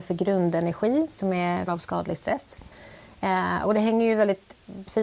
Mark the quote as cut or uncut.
cut